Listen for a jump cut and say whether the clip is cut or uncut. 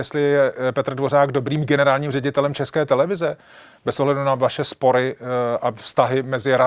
uncut